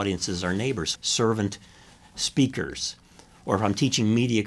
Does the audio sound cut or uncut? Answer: cut